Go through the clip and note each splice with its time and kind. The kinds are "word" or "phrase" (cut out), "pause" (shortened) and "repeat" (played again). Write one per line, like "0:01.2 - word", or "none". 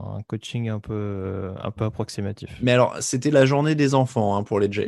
none